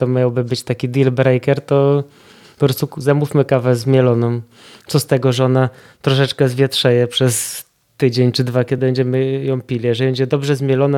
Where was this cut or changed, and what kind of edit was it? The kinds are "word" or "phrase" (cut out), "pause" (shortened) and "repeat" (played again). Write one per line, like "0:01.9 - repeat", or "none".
none